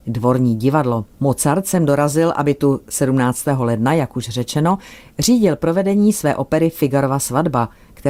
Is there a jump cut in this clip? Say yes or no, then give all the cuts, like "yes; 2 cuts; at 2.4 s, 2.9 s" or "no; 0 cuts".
yes; 1 cut; at 1.1 s